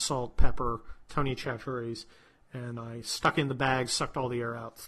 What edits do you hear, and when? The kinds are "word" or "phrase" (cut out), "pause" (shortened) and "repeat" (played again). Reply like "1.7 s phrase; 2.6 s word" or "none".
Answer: 2.8 s word